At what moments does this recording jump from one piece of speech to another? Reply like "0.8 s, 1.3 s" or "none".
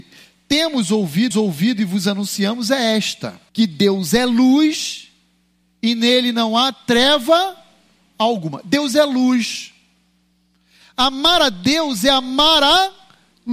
1.3 s, 3.5 s